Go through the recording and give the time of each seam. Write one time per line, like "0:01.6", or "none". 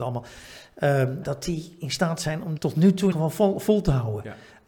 0:01.2
0:02.6
0:03.1